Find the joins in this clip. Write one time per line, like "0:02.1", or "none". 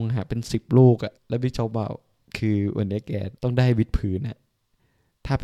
0:01.2
0:03.4